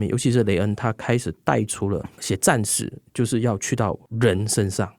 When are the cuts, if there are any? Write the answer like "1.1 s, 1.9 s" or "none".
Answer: 2.1 s